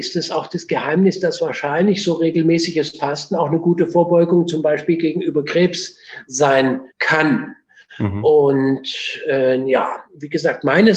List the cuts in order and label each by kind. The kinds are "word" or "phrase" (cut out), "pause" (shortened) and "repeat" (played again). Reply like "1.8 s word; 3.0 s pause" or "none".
6.9 s pause